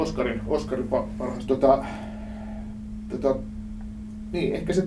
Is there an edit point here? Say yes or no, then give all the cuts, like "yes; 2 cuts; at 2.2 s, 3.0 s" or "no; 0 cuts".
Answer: yes; 1 cut; at 1.5 s